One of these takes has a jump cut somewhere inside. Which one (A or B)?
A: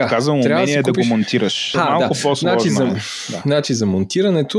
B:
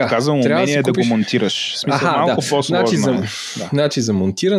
A